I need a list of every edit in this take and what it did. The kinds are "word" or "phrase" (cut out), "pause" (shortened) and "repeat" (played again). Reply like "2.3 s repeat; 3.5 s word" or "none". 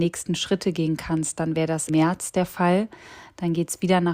1.9 s word